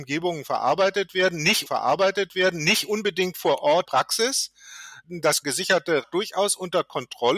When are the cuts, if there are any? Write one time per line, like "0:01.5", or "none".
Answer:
0:01.7
0:03.8
0:05.4
0:06.0